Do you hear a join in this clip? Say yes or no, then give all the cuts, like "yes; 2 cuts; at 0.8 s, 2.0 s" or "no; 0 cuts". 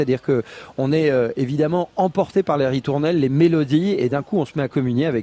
no; 0 cuts